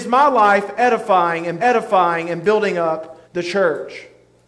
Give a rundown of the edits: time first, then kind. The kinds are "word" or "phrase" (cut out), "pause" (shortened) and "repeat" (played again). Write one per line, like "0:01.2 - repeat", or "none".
0:01.6 - repeat
0:03.2 - pause